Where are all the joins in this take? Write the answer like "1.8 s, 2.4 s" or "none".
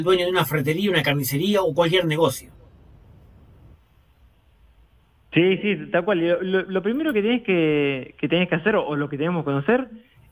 none